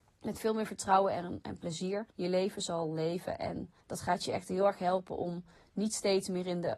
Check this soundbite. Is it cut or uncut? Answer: cut